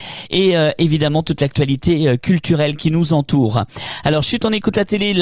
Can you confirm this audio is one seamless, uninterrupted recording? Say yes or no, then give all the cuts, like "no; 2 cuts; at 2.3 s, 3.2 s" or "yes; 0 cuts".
yes; 0 cuts